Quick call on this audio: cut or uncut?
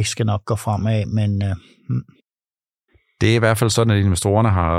uncut